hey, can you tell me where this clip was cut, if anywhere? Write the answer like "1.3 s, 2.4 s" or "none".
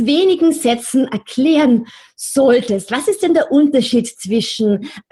none